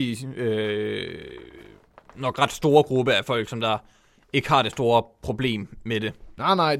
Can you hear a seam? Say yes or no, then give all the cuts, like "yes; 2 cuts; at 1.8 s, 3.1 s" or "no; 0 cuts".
no; 0 cuts